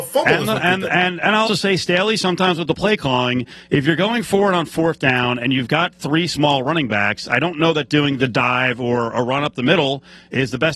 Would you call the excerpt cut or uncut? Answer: cut